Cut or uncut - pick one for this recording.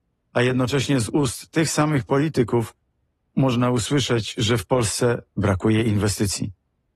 uncut